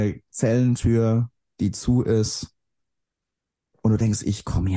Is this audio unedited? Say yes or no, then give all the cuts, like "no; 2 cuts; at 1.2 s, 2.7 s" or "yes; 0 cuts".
yes; 0 cuts